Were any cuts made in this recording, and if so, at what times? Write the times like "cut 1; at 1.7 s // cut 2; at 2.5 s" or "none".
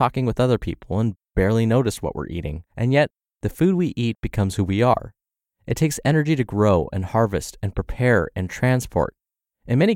cut 1; at 2.7 s